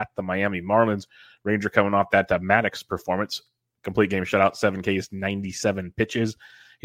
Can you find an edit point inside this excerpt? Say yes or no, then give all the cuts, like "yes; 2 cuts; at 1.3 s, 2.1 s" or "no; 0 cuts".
no; 0 cuts